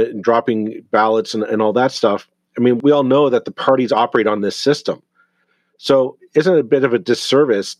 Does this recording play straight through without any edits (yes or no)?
yes